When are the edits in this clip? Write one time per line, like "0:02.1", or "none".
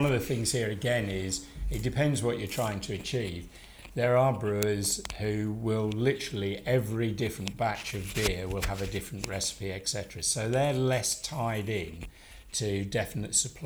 none